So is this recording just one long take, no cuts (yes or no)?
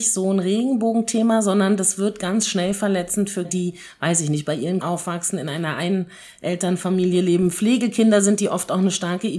no